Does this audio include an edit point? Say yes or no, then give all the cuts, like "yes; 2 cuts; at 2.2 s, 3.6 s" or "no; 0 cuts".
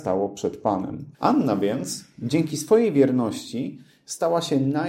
yes; 1 cut; at 1.1 s